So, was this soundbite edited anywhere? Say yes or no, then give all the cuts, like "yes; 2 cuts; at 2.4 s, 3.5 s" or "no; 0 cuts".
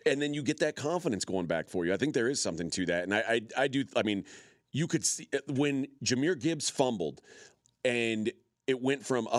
no; 0 cuts